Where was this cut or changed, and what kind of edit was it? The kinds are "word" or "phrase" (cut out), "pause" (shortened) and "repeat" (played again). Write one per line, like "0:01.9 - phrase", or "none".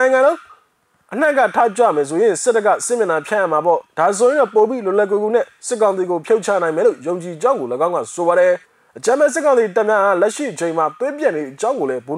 0:08.6 - pause